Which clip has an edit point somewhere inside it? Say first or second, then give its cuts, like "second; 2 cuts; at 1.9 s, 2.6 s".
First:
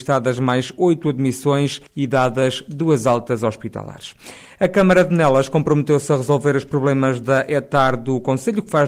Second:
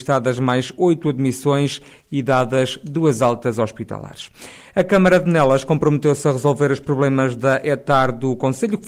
first; 1 cut; at 1.9 s